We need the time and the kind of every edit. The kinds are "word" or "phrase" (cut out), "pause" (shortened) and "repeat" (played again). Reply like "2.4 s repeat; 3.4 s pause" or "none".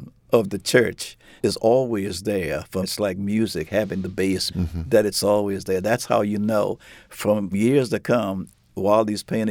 1.4 s word; 2.8 s word; 4.5 s word; 7.5 s word